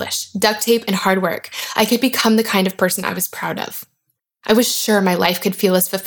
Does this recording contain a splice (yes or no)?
no